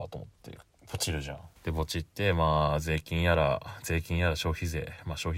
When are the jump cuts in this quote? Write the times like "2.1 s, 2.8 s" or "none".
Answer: 1.6 s